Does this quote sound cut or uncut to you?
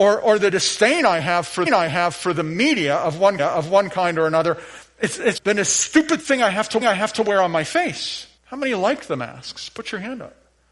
cut